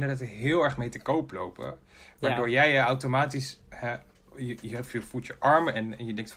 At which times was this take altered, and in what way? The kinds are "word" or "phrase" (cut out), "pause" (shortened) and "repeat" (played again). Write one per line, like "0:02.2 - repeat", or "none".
0:04.2 - pause

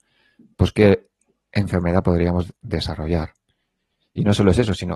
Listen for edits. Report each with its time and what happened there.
none

